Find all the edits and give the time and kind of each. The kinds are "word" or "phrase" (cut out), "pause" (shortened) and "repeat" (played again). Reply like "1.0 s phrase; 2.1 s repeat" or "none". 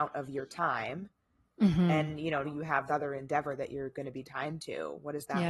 2.4 s word; 2.9 s word; 4.2 s word